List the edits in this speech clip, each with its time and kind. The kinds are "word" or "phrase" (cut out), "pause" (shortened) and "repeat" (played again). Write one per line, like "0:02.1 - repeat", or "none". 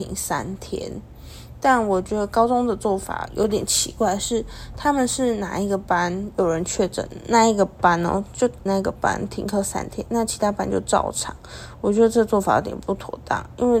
0:08.7 - word